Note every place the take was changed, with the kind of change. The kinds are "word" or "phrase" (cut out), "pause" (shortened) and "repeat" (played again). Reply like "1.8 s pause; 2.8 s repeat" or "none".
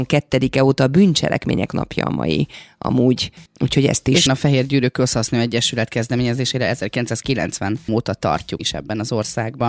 1.7 s word; 3.5 s pause; 4.3 s word; 7.9 s word; 8.6 s word